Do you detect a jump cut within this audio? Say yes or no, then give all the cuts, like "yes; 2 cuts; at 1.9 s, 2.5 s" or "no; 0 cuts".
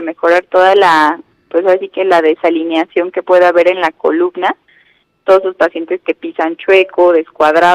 no; 0 cuts